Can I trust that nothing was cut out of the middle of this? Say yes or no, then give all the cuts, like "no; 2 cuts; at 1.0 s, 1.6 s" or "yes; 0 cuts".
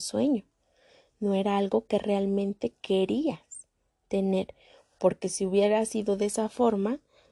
yes; 0 cuts